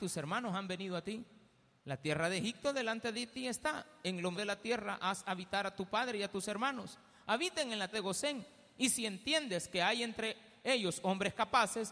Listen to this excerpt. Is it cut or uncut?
cut